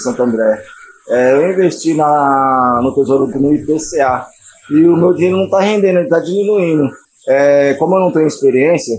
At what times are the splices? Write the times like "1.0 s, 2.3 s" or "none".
3.3 s, 7.0 s

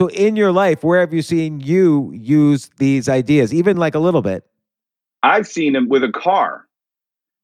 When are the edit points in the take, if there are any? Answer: none

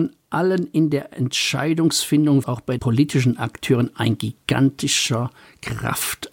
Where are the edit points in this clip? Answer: 2.4 s, 2.8 s

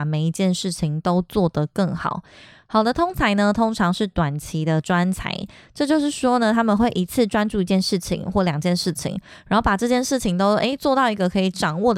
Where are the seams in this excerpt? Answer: none

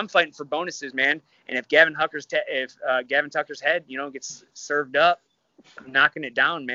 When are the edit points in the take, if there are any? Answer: none

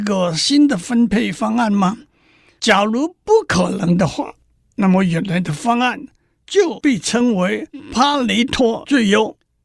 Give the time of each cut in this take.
none

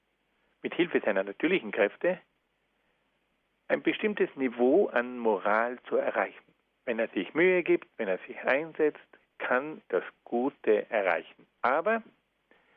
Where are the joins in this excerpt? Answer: 6.6 s, 7.9 s, 9.8 s

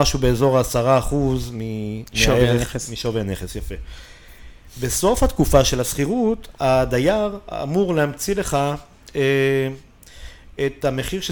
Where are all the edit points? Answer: none

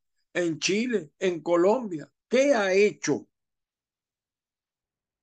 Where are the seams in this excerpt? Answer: 2.2 s

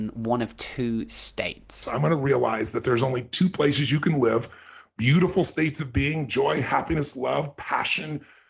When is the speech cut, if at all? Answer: none

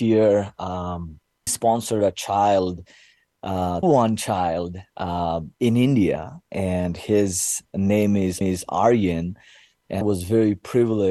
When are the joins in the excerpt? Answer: 1.5 s, 3.8 s, 5.5 s, 8.4 s, 10.0 s

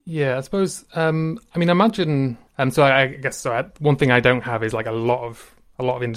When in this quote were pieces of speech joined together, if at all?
2.5 s

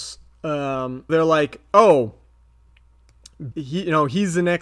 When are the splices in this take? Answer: 1.1 s, 3.5 s

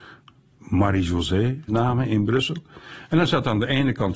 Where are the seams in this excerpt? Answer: 1.7 s

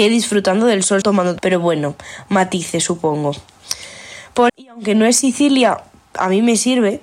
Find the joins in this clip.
1.0 s, 1.4 s, 4.5 s

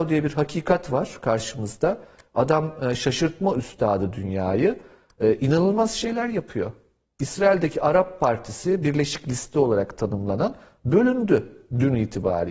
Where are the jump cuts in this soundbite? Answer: none

